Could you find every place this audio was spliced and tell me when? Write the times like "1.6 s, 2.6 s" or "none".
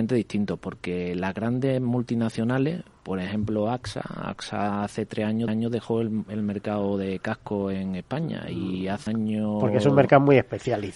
5.5 s, 9.1 s